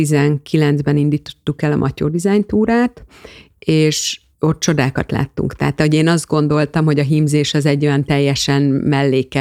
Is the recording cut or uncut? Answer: uncut